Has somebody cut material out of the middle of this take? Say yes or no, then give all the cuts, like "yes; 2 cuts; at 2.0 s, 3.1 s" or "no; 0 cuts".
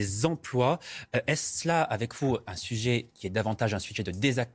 no; 0 cuts